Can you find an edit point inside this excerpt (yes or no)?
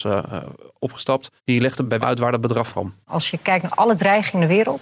yes